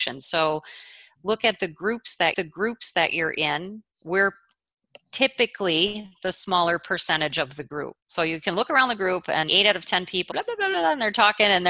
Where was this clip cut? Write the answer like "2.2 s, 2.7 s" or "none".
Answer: 2.3 s, 3.9 s, 8.0 s, 9.5 s, 10.3 s, 10.7 s